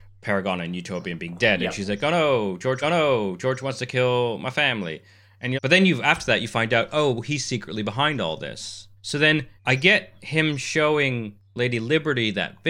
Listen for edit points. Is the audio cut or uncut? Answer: cut